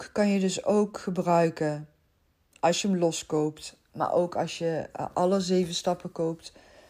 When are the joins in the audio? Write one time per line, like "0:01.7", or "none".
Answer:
none